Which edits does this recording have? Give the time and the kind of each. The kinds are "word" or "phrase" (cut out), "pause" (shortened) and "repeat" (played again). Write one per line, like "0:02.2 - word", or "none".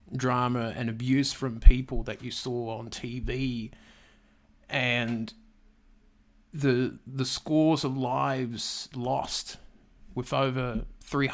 none